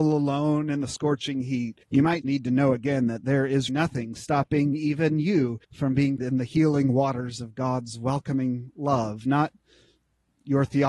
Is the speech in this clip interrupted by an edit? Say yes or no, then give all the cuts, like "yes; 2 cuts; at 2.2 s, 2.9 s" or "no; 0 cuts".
yes; 5 cuts; at 1.8 s, 2.2 s, 3.7 s, 5.6 s, 6.2 s